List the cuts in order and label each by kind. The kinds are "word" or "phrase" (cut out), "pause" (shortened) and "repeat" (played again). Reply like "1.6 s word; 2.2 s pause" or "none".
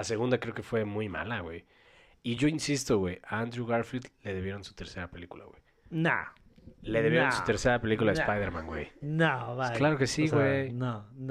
none